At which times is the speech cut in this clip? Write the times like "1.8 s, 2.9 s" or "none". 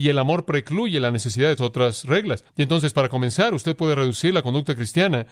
1.6 s, 2.5 s